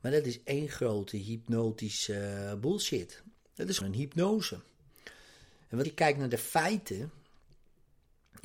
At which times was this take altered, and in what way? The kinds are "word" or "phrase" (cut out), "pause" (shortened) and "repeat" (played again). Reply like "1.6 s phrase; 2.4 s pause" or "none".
3.8 s word; 5.8 s word